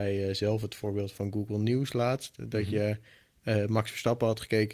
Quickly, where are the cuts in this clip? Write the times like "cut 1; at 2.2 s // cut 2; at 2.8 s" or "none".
cut 1; at 1.1 s